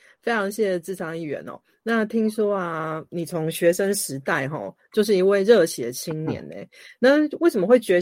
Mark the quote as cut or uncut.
uncut